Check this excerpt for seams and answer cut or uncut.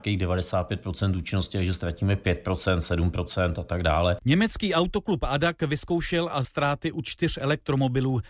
cut